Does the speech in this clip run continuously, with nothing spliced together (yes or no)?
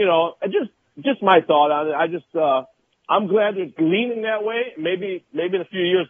yes